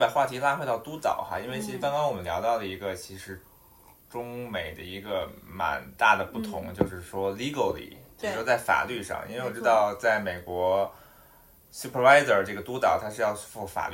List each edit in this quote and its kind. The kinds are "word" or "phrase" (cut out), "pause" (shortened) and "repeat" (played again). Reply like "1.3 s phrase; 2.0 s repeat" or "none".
none